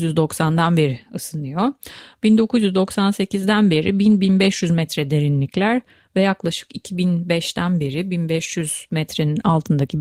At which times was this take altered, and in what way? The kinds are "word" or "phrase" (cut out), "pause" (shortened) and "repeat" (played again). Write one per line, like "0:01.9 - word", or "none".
none